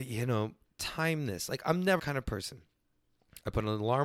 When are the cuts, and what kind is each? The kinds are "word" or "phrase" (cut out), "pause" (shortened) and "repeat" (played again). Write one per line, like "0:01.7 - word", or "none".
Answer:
0:02.0 - word